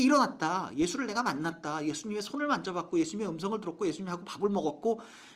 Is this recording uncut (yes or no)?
yes